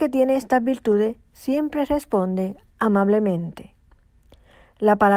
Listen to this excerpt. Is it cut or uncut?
uncut